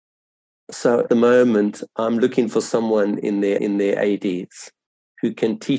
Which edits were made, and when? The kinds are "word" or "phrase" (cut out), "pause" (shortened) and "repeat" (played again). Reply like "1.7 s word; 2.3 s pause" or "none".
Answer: 1.1 s word; 3.6 s repeat